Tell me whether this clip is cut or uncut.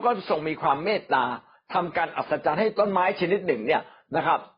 uncut